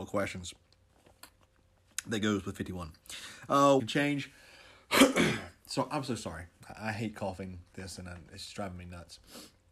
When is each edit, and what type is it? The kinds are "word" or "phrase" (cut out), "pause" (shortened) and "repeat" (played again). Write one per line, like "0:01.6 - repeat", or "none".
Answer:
0:03.8 - phrase
0:07.7 - word